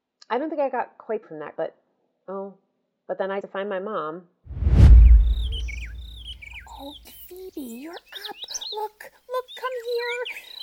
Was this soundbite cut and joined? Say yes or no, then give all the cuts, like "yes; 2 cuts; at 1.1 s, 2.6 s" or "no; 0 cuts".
yes; 5 cuts; at 1.2 s, 1.6 s, 3.4 s, 7.0 s, 9.5 s